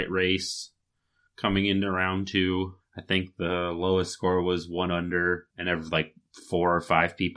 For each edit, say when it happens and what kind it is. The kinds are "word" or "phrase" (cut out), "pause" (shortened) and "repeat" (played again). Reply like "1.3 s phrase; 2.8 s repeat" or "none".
2.8 s pause; 5.5 s pause